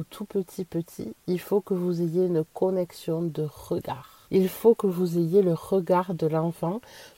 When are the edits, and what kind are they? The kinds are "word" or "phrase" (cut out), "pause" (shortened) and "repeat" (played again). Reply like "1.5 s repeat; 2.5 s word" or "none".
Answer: 4.2 s pause